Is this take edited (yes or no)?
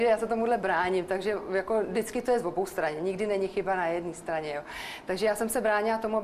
no